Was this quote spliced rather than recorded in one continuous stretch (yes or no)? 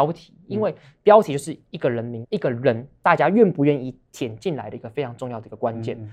yes